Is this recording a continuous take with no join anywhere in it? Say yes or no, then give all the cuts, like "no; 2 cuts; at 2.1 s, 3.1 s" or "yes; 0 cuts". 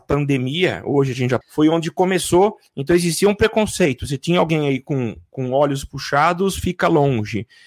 no; 1 cut; at 1.4 s